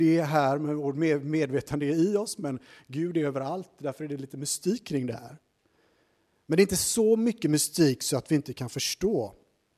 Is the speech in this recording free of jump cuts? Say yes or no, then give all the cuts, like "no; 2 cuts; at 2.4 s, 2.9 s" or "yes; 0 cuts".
yes; 0 cuts